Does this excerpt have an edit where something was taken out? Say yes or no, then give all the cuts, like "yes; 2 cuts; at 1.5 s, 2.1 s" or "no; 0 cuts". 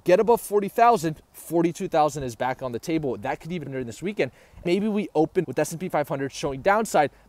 yes; 3 cuts; at 3.6 s, 4.6 s, 5.4 s